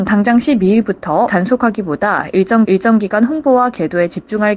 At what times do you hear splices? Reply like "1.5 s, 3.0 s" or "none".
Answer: 1.3 s, 2.6 s